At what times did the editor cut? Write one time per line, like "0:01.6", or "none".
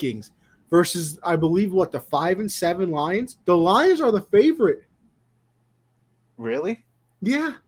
0:03.4